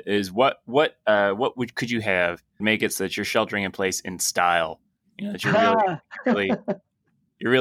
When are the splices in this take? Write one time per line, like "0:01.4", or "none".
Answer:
0:02.6